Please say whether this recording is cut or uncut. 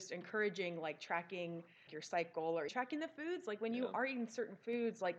cut